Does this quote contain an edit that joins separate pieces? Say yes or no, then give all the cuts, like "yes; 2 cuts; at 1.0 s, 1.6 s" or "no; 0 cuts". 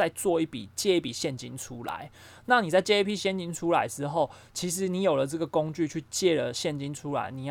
no; 0 cuts